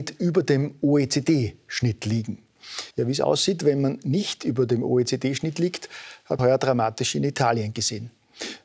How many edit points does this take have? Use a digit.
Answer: 2